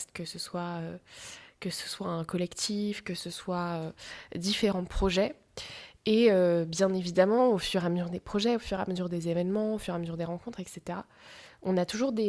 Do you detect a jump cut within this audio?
no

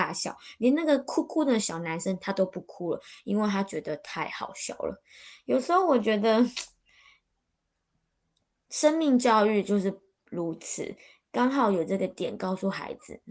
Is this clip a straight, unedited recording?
yes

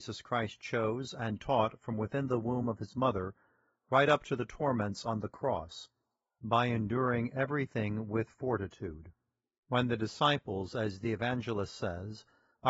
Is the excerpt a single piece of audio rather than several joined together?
yes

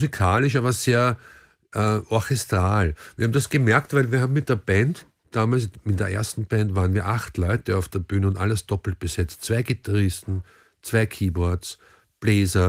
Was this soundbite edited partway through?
no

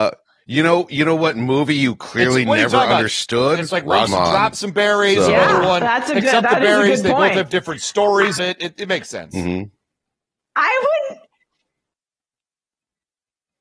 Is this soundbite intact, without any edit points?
no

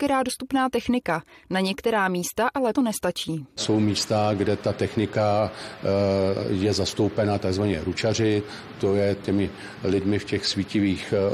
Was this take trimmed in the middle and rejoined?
yes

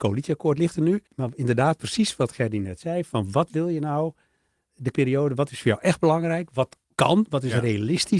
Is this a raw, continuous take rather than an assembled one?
no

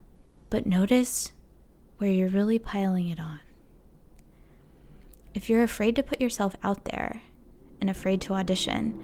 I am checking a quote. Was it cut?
no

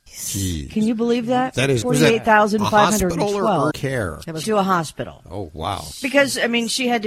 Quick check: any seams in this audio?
yes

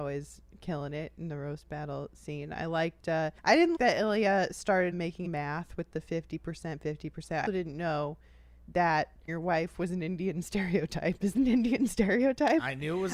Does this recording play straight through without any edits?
no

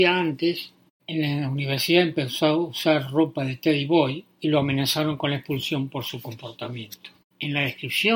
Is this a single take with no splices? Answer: yes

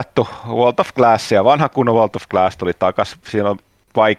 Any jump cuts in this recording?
no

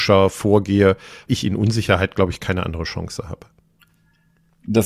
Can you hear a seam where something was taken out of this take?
yes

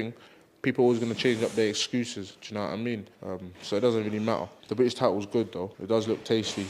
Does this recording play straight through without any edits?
no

